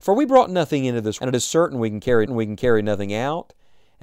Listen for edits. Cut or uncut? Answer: cut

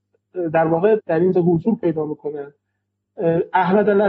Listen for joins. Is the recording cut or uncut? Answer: cut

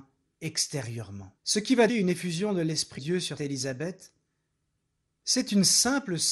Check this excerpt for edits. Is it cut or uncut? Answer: cut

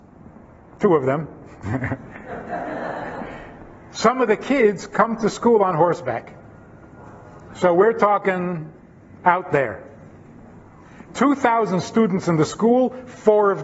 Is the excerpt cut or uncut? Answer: uncut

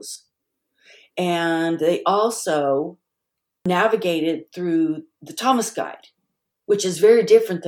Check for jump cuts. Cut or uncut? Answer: uncut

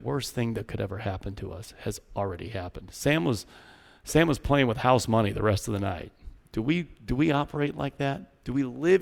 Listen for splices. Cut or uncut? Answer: uncut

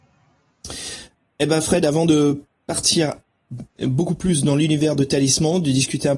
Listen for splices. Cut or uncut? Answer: uncut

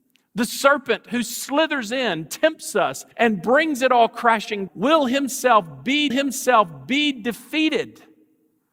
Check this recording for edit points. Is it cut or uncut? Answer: cut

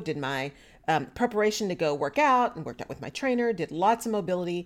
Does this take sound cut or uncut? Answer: uncut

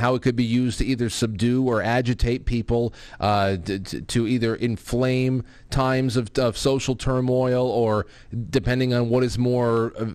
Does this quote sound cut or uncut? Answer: uncut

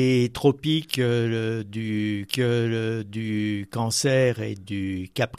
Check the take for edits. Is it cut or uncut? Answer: cut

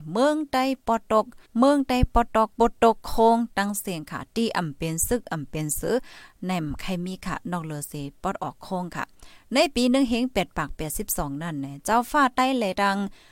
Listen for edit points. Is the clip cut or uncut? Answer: cut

